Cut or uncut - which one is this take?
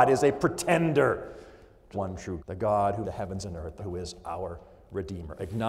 cut